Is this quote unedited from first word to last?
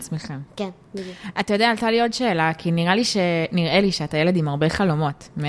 yes; 0 cuts

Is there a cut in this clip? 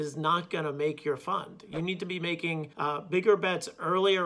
yes; 1 cut; at 2.7 s

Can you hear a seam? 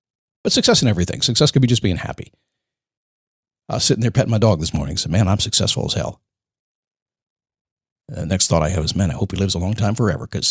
no; 0 cuts

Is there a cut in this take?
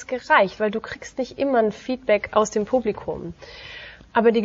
no; 0 cuts

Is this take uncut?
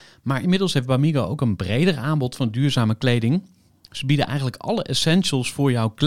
yes; 0 cuts

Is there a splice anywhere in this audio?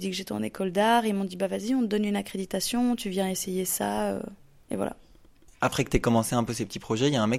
no; 0 cuts

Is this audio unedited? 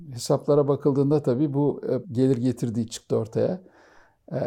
no; 1 cut; at 2.0 s

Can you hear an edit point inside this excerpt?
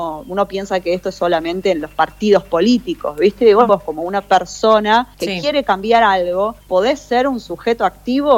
yes; 3 cuts; at 3.7 s, 5.1 s, 6.6 s

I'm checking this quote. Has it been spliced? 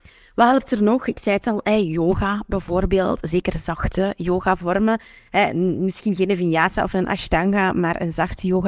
no; 0 cuts

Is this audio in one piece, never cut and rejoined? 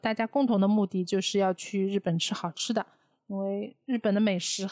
yes; 0 cuts

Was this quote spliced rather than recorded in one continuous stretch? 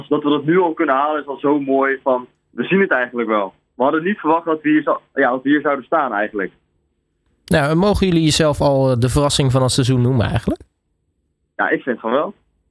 no; 0 cuts

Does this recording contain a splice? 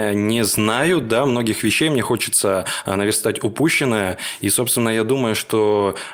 no; 0 cuts

